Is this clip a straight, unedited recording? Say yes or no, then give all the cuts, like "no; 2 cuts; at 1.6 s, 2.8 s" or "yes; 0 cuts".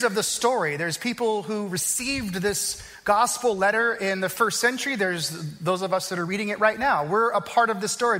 yes; 0 cuts